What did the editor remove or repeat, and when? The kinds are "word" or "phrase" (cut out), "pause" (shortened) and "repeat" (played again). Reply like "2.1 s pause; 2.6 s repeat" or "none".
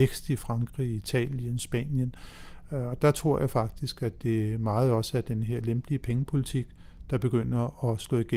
none